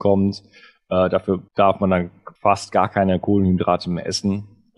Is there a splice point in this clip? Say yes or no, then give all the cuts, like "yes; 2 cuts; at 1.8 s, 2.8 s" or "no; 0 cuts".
yes; 2 cuts; at 1.5 s, 2.4 s